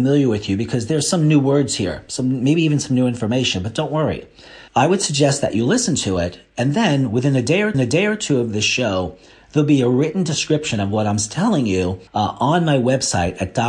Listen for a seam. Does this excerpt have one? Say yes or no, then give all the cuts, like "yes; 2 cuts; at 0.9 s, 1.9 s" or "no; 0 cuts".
yes; 3 cuts; at 4.7 s, 7.7 s, 12.1 s